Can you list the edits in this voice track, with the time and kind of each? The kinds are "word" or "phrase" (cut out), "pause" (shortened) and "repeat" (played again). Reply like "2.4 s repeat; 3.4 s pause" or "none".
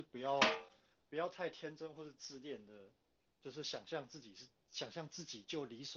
none